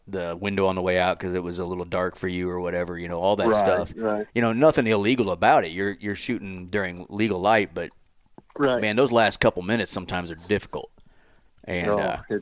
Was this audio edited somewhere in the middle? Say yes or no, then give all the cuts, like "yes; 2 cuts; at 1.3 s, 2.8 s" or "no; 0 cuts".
no; 0 cuts